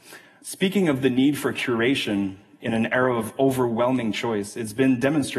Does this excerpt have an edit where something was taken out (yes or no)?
no